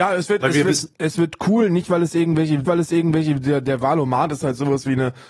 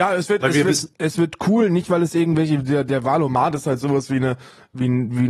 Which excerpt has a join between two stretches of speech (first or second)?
first